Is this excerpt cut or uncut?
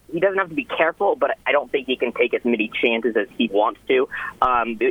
cut